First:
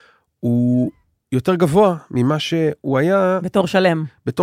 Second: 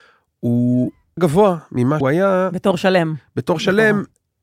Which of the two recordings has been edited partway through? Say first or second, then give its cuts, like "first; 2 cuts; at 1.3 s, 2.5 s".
second; 2 cuts; at 1.2 s, 2.0 s